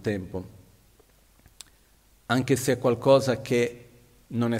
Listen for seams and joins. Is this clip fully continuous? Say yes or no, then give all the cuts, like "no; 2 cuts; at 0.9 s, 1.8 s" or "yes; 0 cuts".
yes; 0 cuts